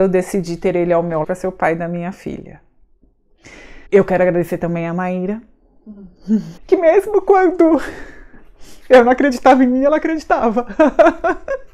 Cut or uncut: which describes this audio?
cut